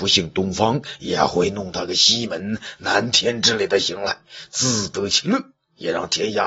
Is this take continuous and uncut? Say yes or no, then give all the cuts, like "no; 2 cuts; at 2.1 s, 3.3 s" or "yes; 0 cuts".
yes; 0 cuts